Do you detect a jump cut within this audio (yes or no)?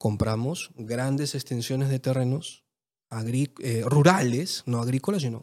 no